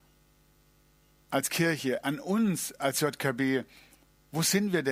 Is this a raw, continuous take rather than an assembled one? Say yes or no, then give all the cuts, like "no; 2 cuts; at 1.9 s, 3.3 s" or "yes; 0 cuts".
yes; 0 cuts